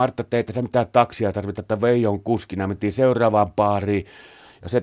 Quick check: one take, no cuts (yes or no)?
yes